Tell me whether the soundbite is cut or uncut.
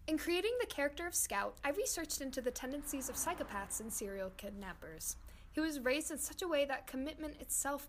uncut